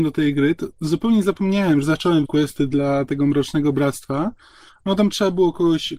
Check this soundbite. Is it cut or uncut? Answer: cut